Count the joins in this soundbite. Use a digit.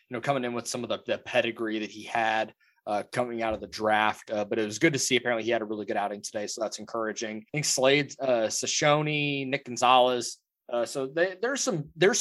1